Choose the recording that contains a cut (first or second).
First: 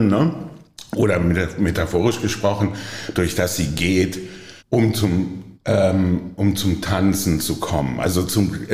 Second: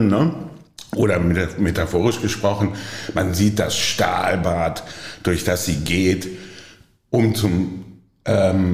first